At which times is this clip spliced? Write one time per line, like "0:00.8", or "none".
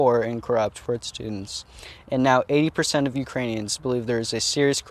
none